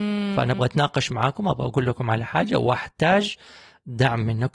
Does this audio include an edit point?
no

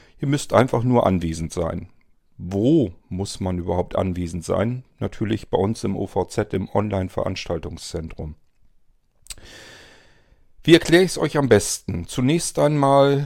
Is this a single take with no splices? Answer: yes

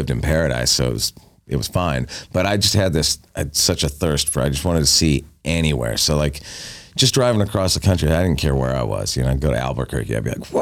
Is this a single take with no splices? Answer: yes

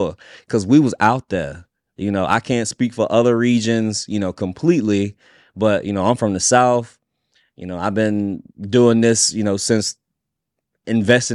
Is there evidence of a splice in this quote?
yes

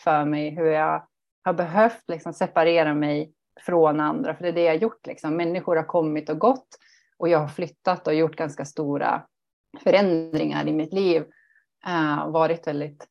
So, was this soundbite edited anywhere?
no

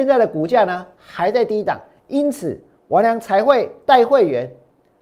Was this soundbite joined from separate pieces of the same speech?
no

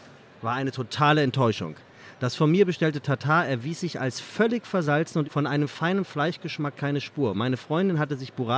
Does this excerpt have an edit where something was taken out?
yes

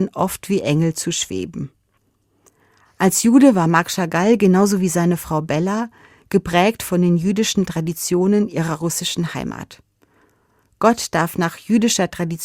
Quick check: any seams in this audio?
no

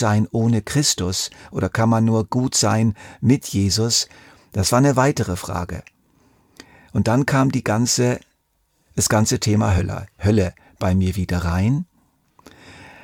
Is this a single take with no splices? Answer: yes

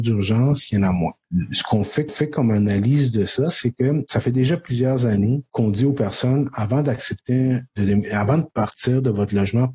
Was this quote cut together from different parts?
yes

